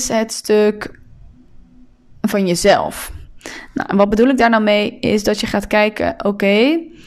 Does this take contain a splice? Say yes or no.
no